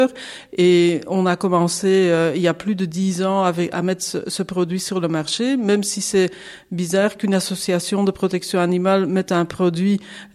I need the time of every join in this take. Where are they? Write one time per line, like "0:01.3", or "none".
none